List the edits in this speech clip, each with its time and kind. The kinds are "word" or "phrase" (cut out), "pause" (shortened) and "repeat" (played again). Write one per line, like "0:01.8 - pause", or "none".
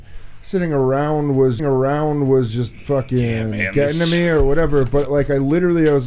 0:01.6 - repeat